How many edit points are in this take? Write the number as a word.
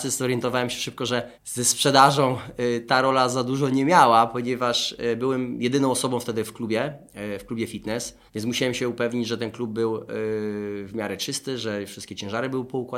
two